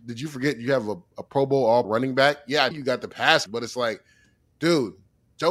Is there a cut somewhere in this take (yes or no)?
yes